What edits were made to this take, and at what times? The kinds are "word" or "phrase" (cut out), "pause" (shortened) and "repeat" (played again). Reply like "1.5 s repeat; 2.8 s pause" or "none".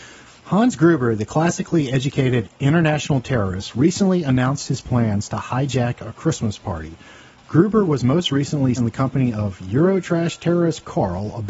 8.7 s word